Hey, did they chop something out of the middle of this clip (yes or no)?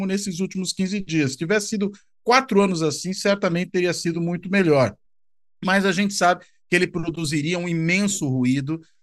no